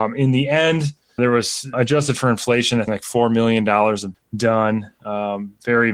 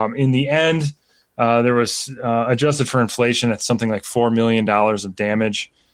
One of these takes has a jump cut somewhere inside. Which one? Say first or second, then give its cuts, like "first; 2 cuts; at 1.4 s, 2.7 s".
first; 4 cuts; at 1.2 s, 1.7 s, 2.9 s, 4.1 s